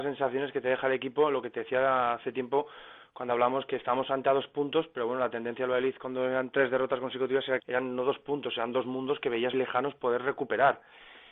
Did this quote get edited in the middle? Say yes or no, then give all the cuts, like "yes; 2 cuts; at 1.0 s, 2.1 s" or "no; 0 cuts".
yes; 2 cuts; at 7.6 s, 9.5 s